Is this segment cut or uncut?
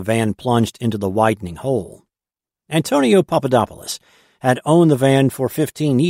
uncut